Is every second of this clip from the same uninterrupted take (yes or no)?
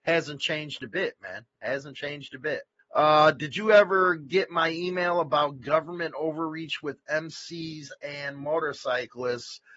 no